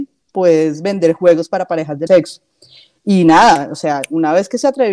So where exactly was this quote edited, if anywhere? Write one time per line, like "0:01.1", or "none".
0:02.1